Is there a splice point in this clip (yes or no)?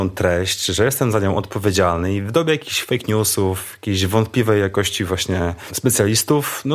no